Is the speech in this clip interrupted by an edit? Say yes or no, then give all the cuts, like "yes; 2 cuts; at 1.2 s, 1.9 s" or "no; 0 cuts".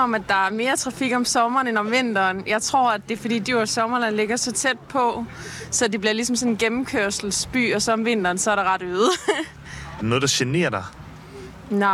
no; 0 cuts